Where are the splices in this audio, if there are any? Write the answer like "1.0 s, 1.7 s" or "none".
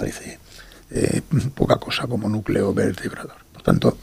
none